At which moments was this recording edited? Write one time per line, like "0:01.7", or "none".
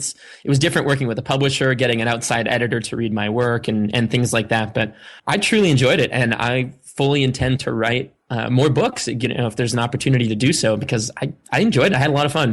0:05.2
0:08.2